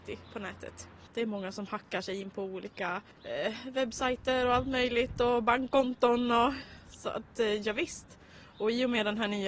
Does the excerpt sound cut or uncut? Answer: cut